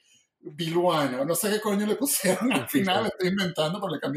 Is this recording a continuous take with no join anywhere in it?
yes; 0 cuts

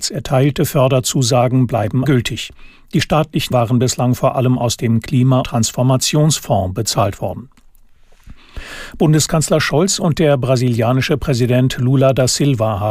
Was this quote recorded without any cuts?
no; 3 cuts; at 2.0 s, 3.5 s, 5.4 s

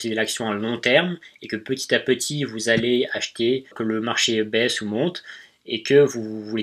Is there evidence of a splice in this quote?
yes; 1 cut; at 3.7 s

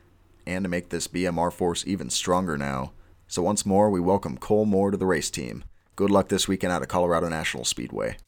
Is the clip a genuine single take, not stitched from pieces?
yes; 0 cuts

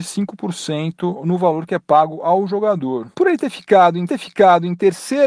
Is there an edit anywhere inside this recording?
yes; 2 cuts; at 3.1 s, 4.1 s

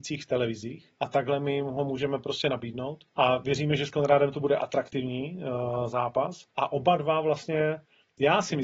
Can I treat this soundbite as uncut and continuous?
no; 3 cuts; at 0.9 s, 3.1 s, 6.5 s

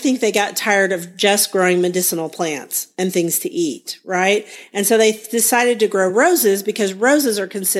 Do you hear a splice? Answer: no; 0 cuts

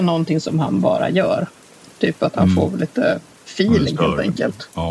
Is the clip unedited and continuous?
yes; 0 cuts

